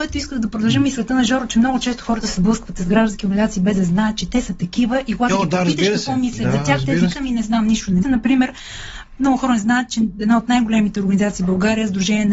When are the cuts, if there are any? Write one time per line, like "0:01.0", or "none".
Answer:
0:07.1
0:08.0

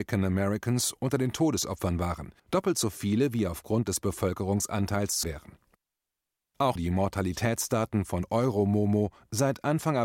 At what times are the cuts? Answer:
0:02.4
0:05.2
0:06.8

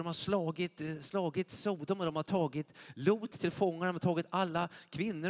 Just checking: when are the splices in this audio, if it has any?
none

